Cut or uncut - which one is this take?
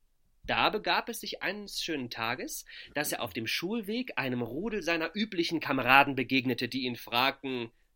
uncut